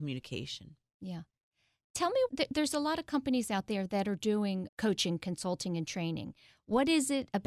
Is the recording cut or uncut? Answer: cut